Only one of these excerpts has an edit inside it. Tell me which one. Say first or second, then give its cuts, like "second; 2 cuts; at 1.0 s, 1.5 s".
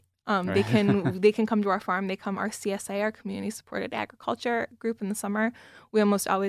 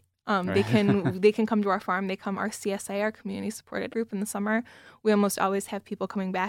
second; 1 cut; at 3.9 s